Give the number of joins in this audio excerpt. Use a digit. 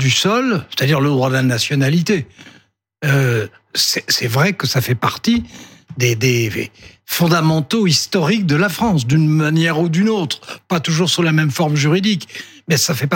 0